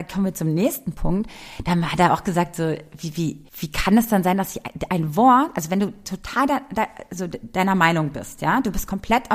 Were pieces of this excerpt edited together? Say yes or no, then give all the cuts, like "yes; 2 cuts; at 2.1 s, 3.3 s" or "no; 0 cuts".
yes; 1 cut; at 3.5 s